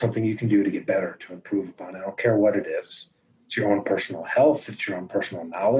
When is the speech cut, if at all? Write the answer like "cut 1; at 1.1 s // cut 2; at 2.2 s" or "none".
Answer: none